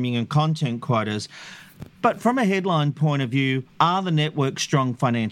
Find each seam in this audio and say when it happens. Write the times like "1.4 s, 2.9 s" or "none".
3.7 s